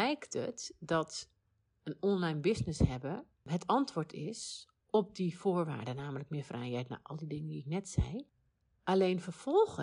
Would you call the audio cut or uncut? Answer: uncut